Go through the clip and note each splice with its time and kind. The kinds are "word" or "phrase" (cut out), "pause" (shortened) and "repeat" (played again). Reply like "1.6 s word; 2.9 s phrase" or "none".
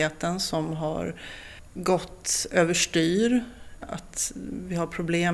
1.6 s pause